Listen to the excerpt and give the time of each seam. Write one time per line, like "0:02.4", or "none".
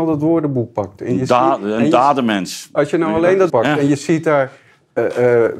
0:03.5

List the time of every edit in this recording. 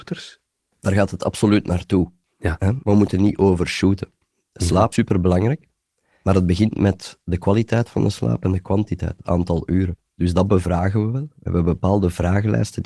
0:04.9

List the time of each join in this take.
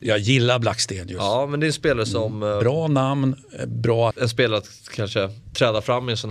0:04.1

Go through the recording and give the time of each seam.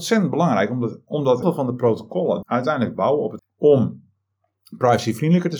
0:01.4
0:02.4
0:03.4

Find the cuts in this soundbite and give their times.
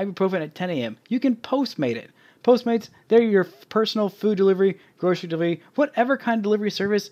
none

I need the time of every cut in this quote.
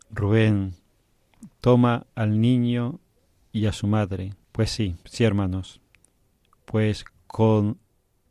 0:04.4
0:05.0

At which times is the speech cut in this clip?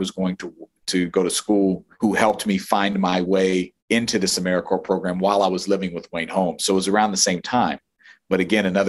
0:01.9
0:03.8

